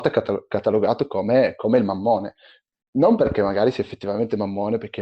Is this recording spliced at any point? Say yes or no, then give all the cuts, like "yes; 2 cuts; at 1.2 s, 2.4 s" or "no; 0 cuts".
no; 0 cuts